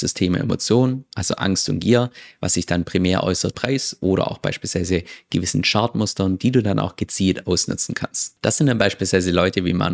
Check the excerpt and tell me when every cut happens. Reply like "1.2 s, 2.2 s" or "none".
3.5 s